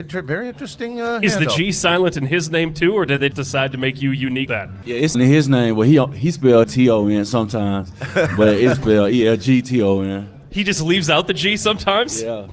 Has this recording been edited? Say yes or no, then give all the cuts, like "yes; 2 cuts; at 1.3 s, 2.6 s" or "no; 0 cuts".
yes; 5 cuts; at 3.3 s, 4.5 s, 5.1 s, 6.6 s, 8.7 s